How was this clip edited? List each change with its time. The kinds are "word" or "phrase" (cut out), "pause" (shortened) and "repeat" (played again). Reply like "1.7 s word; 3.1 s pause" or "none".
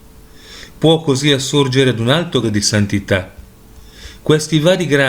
2.4 s word